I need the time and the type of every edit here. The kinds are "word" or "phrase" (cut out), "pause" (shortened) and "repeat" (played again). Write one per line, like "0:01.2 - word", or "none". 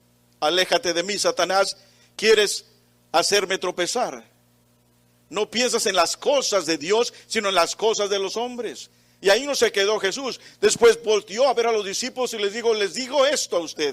none